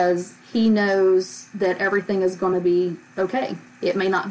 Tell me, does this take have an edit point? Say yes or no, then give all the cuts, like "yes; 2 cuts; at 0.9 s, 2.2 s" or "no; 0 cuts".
no; 0 cuts